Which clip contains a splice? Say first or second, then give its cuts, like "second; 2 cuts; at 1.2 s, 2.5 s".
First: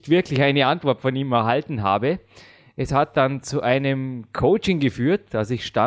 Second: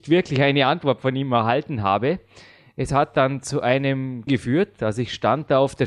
second; 1 cut; at 4.3 s